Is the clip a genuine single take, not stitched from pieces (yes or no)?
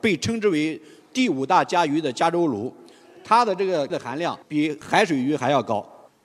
no